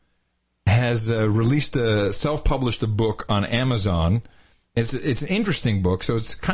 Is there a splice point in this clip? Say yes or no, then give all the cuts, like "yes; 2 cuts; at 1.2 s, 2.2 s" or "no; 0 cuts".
no; 0 cuts